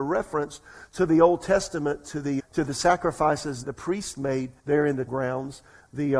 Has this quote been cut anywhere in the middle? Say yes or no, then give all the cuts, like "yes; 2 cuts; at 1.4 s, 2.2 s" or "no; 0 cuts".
yes; 4 cuts; at 2.4 s, 3.6 s, 4.6 s, 5.1 s